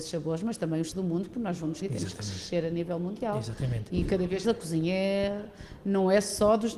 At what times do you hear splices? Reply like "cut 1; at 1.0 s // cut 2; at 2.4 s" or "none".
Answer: cut 1; at 0.9 s // cut 2; at 1.8 s // cut 3; at 4.4 s